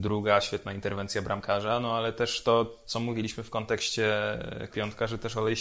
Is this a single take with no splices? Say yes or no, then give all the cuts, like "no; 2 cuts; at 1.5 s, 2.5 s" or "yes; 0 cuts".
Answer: no; 1 cut; at 4.7 s